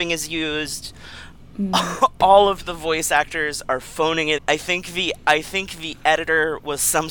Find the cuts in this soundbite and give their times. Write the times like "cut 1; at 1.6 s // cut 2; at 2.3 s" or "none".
cut 1; at 4.4 s